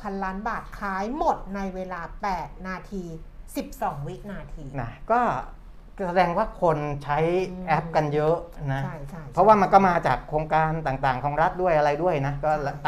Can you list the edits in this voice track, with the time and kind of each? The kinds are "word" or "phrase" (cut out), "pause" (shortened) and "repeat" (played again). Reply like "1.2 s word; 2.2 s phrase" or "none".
4.7 s phrase